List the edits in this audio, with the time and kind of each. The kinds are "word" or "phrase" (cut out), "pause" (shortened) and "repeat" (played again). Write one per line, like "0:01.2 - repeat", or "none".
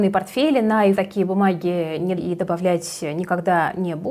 0:00.9 - phrase
0:02.2 - word